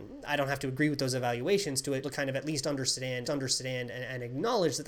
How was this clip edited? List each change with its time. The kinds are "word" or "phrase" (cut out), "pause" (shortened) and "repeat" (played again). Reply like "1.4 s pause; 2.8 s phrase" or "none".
2.0 s phrase; 3.2 s repeat